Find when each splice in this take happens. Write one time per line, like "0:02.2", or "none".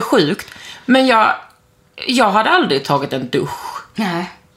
none